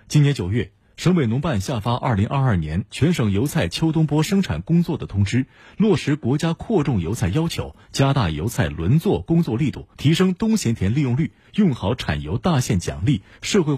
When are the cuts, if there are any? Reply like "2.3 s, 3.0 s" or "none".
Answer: 9.9 s